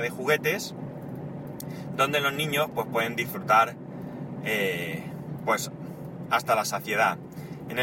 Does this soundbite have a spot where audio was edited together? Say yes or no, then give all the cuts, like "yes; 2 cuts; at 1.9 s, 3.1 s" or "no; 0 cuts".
no; 0 cuts